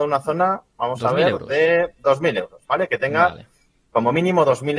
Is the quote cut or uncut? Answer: uncut